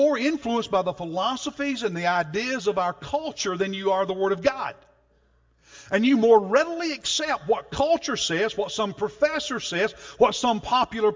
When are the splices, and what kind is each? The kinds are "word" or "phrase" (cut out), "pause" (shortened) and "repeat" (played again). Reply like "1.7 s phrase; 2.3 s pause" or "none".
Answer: none